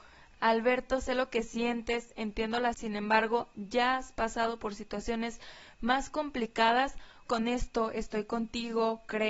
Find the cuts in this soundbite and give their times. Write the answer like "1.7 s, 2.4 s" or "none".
2.7 s, 7.3 s